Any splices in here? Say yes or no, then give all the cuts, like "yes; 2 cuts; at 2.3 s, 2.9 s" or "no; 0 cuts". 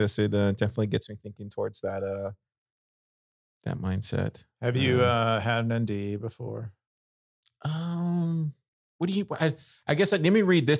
no; 0 cuts